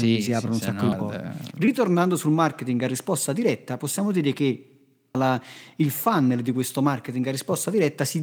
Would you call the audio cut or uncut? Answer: cut